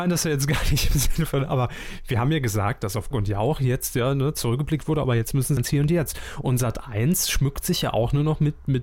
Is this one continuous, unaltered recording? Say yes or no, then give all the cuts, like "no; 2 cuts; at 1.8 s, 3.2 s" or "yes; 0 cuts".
no; 2 cuts; at 3.1 s, 5.6 s